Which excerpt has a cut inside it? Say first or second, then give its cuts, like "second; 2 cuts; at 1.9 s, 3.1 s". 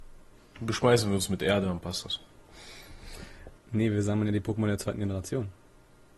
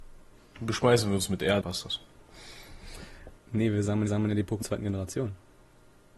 second; 3 cuts; at 1.6 s, 4.1 s, 4.6 s